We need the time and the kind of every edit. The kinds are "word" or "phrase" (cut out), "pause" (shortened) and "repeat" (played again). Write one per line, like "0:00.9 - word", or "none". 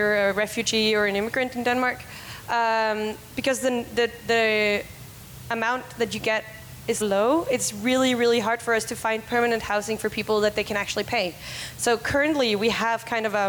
0:07.0 - word